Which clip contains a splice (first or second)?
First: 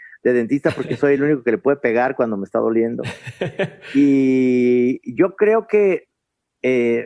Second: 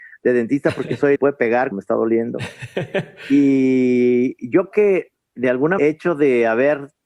second